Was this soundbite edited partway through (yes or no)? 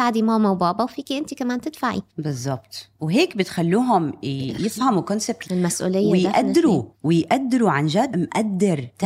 yes